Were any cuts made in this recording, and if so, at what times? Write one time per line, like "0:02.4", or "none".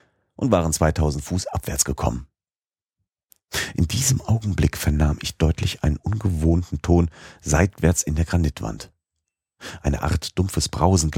none